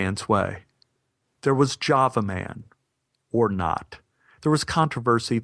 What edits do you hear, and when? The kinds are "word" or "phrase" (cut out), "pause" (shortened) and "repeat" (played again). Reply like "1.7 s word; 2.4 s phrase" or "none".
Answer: none